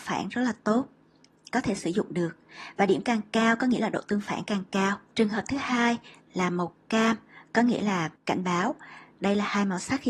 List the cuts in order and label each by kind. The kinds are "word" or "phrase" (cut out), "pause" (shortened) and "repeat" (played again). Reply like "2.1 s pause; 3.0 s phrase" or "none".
none